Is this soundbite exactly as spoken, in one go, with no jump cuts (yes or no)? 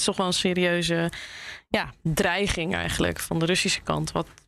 yes